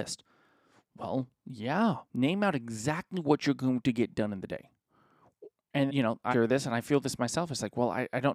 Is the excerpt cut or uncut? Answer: cut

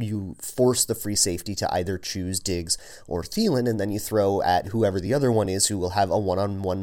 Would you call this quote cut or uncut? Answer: uncut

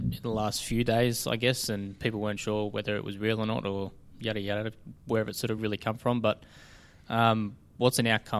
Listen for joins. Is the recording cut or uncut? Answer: uncut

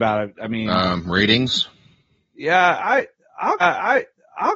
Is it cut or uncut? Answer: cut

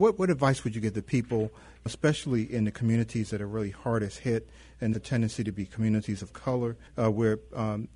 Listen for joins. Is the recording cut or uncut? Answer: cut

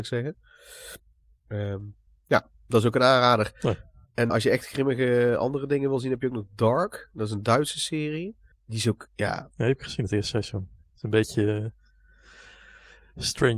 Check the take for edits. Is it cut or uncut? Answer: cut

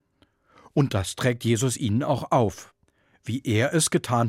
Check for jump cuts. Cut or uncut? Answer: uncut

